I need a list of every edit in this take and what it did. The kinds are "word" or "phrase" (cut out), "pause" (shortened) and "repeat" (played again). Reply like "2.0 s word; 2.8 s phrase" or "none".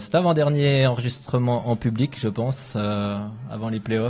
none